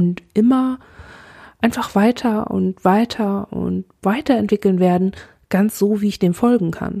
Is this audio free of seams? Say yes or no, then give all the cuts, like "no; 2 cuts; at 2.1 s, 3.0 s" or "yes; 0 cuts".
yes; 0 cuts